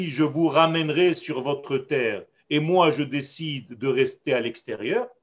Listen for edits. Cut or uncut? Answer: uncut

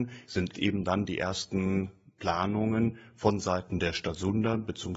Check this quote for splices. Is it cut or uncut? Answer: uncut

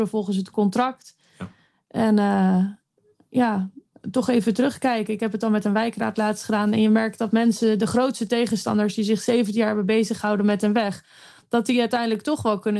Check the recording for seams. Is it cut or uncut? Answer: uncut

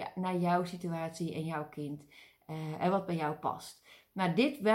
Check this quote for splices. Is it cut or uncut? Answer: uncut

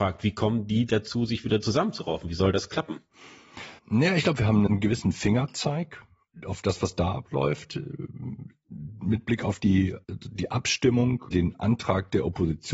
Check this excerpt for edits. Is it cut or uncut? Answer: cut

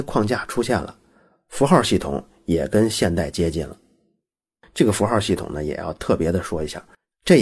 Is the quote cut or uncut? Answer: uncut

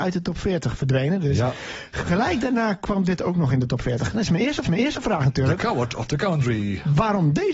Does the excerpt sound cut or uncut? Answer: cut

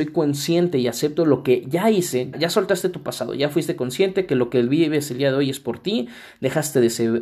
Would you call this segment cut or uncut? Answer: cut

